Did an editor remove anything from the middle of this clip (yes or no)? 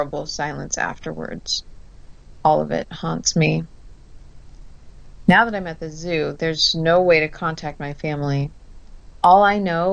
no